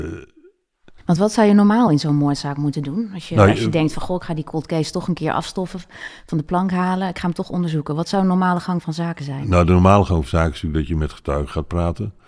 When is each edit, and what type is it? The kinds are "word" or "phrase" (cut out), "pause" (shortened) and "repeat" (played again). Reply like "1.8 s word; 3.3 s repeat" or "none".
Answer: none

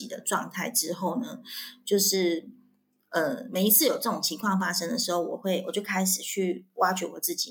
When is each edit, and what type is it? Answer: none

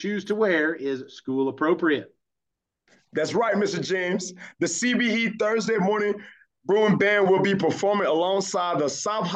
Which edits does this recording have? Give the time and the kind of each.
none

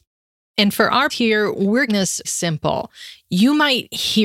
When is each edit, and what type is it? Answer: 1.1 s word; 1.9 s word; 2.2 s word

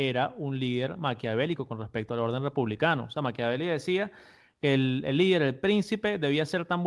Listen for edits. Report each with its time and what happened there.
none

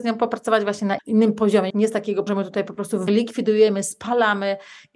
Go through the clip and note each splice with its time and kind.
1.0 s word; 1.7 s word; 2.3 s word; 3.1 s word

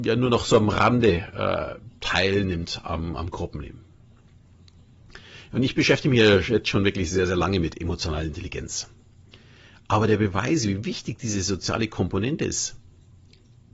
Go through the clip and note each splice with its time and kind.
none

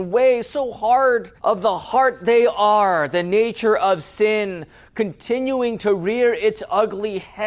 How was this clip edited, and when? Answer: 1.4 s pause

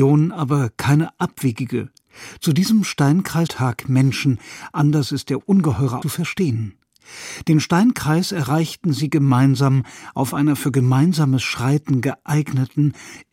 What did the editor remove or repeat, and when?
3.5 s phrase; 6.0 s phrase

